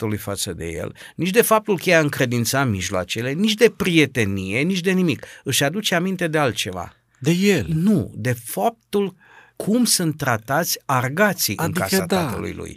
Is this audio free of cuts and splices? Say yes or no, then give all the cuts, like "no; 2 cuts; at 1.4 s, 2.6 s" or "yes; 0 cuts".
yes; 0 cuts